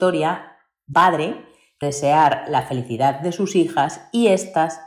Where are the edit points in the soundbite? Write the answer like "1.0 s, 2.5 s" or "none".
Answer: 0.9 s, 1.8 s